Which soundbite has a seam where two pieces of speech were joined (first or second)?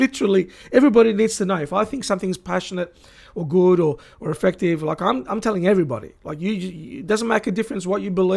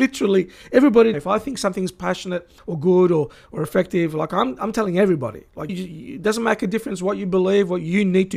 second